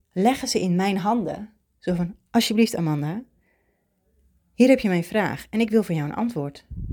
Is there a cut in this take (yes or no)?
no